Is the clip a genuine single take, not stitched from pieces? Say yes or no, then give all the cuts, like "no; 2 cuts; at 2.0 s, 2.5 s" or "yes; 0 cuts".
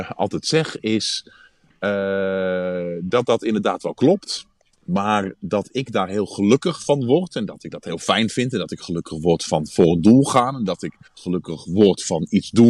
no; 2 cuts; at 4.7 s, 11.1 s